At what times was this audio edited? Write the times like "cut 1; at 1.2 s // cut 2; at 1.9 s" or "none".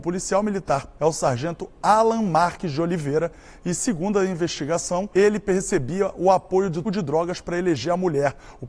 cut 1; at 1.0 s // cut 2; at 5.1 s // cut 3; at 6.8 s